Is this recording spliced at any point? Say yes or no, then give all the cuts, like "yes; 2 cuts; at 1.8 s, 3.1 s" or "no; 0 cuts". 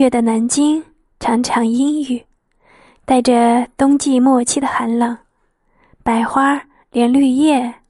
no; 0 cuts